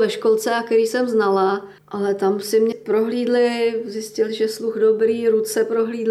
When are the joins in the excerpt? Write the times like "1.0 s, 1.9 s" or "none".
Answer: 1.8 s, 2.7 s